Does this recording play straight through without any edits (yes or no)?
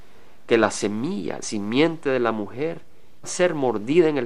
no